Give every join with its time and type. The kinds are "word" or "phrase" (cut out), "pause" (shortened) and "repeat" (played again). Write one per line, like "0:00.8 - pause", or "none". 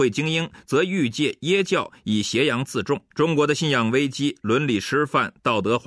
0:03.1 - pause